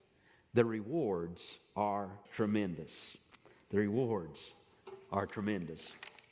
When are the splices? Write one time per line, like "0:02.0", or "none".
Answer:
0:02.2

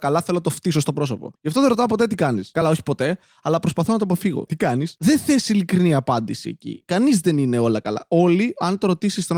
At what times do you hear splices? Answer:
none

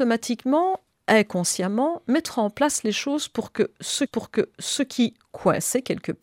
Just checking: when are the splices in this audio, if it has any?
0:04.1

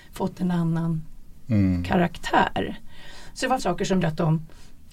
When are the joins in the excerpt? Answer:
0:03.6
0:04.0

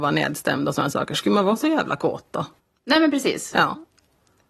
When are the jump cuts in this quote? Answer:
0:02.6

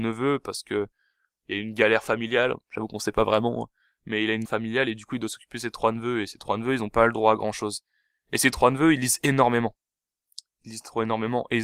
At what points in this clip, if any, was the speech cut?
0:04.5

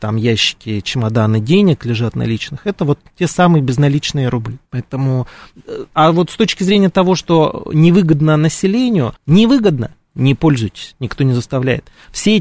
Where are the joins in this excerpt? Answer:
0:04.7
0:09.2

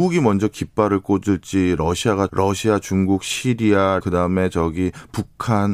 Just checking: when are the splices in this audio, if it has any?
0:02.3
0:04.0

